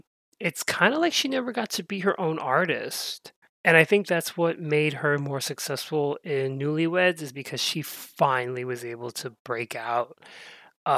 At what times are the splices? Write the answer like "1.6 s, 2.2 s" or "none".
3.5 s